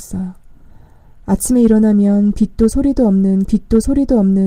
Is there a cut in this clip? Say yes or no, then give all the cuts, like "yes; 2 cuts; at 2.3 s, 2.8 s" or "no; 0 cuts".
yes; 1 cut; at 3.5 s